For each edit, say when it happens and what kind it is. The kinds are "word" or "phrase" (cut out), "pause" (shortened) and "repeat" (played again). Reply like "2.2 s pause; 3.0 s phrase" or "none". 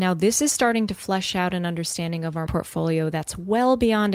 2.5 s word